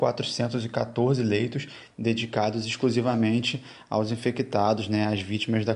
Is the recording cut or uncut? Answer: uncut